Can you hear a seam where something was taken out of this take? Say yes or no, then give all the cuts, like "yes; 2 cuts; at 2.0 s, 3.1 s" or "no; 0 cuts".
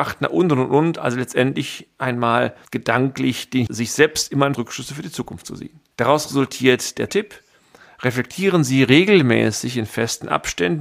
yes; 5 cuts; at 2.7 s, 3.7 s, 4.5 s, 5.9 s, 7.1 s